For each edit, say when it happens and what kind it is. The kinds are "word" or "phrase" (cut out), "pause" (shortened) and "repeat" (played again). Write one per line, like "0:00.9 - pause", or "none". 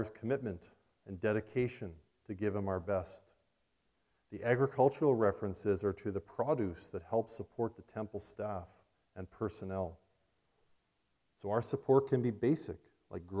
none